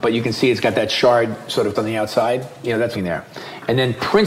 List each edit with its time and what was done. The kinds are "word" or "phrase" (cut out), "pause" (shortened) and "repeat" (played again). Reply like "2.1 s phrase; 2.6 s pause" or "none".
1.7 s word; 2.9 s phrase